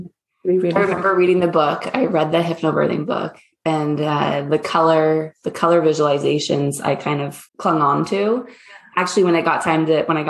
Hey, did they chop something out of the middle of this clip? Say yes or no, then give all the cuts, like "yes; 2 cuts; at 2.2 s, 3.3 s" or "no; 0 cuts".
yes; 1 cut; at 7.5 s